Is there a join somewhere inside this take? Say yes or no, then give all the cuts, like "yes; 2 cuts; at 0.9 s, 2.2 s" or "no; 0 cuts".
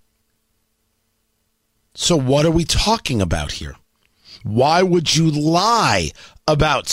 no; 0 cuts